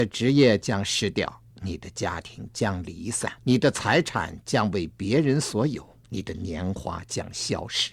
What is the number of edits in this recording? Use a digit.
3